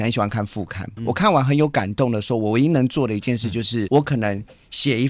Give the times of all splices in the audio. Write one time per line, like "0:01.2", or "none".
0:01.0
0:03.9